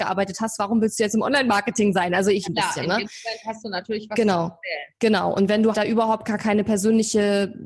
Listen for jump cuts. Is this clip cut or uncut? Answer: cut